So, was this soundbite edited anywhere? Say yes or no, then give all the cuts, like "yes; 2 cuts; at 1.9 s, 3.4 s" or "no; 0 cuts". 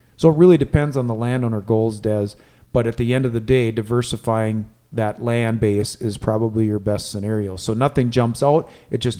no; 0 cuts